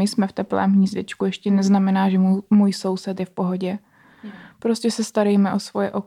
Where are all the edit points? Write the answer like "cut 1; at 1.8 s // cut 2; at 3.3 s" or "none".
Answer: none